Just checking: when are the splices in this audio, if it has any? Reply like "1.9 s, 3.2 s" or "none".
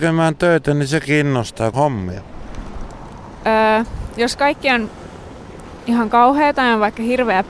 1.7 s